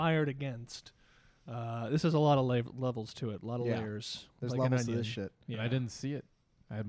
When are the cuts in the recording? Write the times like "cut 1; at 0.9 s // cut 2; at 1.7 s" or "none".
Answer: none